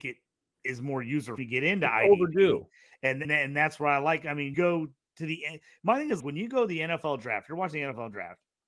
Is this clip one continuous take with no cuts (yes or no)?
no